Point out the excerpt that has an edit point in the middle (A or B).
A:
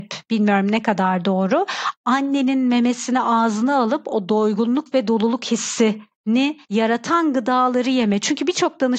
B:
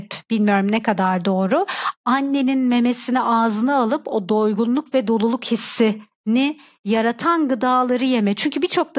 A